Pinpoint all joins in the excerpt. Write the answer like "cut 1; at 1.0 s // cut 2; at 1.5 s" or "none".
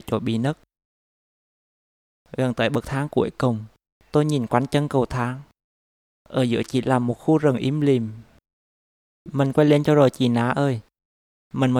none